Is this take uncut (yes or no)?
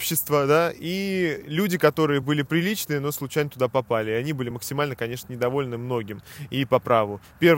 yes